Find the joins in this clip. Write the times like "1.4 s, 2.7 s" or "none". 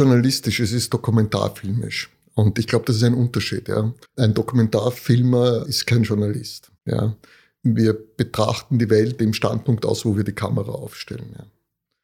4.0 s, 6.8 s, 9.2 s